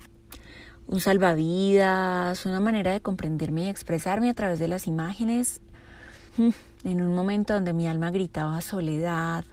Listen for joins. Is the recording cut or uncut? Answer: cut